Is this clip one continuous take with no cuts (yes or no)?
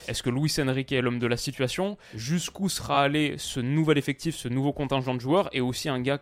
yes